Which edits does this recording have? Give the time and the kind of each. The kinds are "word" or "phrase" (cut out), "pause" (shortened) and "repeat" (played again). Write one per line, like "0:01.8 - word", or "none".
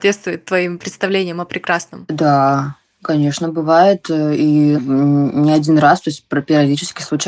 0:04.8 - word